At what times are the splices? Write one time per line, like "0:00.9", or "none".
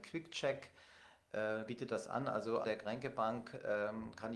0:01.7
0:02.6